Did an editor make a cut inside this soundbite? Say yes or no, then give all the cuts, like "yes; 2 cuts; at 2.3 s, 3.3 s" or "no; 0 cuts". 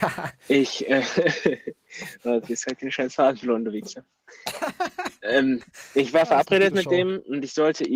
no; 0 cuts